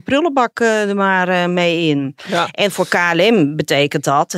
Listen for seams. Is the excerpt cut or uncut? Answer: uncut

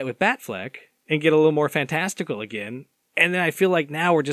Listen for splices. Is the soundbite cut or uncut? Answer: uncut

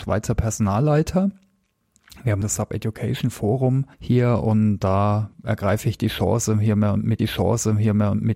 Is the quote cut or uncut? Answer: cut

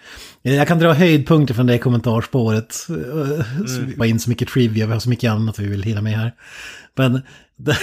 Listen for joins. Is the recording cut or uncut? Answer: cut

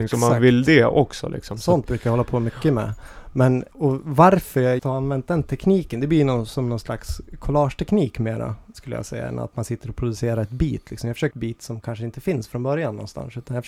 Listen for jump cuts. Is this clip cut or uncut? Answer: cut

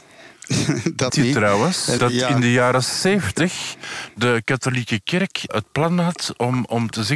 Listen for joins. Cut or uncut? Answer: cut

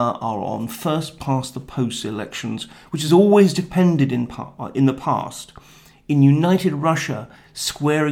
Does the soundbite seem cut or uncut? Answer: uncut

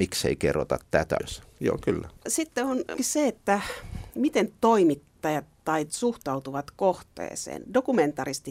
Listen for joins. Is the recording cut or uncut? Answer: cut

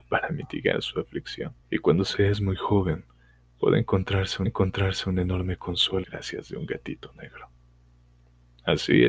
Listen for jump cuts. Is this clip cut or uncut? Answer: cut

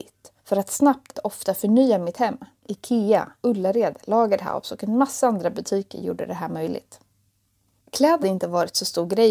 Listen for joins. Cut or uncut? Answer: cut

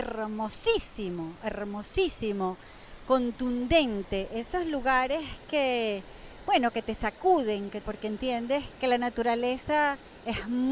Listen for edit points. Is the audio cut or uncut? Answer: cut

